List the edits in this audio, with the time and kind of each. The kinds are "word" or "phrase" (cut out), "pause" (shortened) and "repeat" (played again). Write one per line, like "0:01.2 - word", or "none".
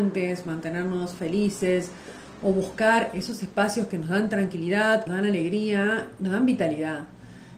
0:05.1 - phrase